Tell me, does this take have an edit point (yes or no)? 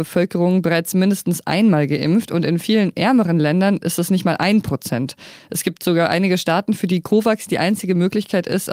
no